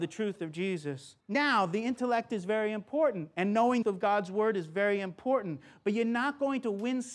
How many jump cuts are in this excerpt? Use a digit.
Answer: 2